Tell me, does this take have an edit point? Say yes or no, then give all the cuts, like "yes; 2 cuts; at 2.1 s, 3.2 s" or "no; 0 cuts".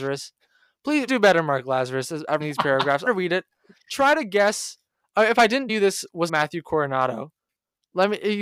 yes; 5 cuts; at 1.1 s, 2.4 s, 3.1 s, 5.7 s, 6.3 s